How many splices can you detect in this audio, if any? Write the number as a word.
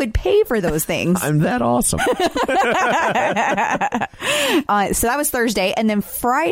one